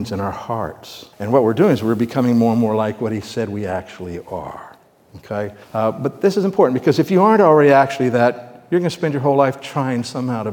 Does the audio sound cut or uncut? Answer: cut